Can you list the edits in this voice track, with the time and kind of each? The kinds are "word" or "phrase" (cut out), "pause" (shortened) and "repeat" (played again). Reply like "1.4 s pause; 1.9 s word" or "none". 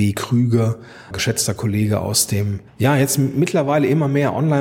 1.1 s word; 2.7 s pause